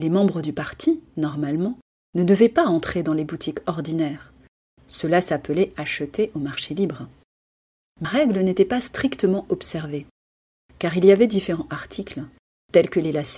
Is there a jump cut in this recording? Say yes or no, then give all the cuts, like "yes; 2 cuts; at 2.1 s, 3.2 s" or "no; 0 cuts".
yes; 1 cut; at 8.0 s